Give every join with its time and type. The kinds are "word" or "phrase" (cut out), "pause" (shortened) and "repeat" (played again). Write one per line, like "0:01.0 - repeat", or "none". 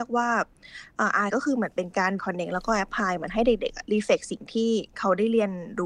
0:01.3 - word
0:02.2 - word